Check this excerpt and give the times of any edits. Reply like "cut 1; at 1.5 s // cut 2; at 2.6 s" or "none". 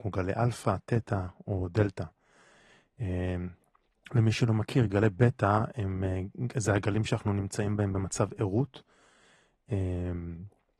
none